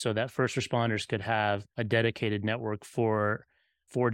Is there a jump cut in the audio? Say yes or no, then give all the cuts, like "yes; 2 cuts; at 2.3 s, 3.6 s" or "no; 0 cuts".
yes; 1 cut; at 1.7 s